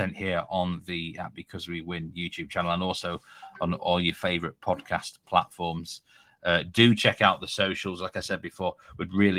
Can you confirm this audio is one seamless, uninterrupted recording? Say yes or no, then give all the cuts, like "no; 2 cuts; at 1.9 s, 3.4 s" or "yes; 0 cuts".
yes; 0 cuts